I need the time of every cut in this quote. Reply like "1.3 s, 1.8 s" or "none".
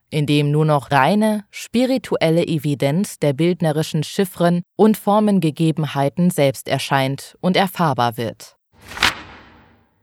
0.9 s